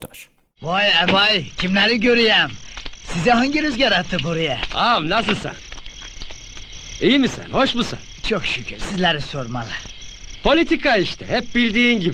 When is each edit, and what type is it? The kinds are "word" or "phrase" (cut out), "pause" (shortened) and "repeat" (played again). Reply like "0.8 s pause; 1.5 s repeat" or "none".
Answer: 1.1 s word

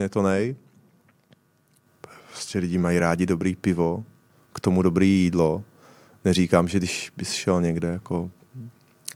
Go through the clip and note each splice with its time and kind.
none

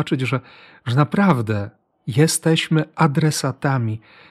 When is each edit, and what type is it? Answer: none

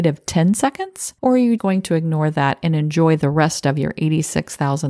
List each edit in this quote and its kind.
1.2 s pause; 1.6 s word

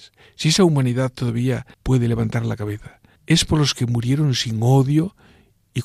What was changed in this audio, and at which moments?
1.7 s pause; 3.2 s pause

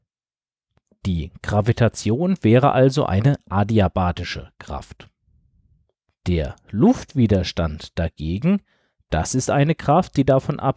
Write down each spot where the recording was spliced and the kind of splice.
none

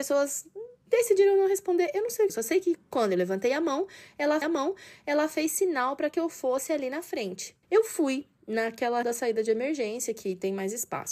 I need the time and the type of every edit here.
2.3 s word; 4.4 s repeat; 7.6 s pause; 9.0 s word

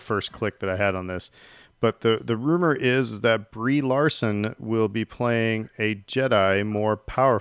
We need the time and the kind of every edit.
none

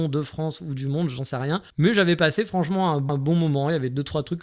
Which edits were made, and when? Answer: 1.7 s pause; 3.1 s repeat

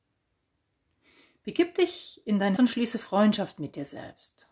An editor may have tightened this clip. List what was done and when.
2.6 s word

